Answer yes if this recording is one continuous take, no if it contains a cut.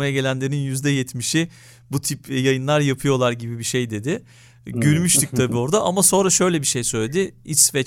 yes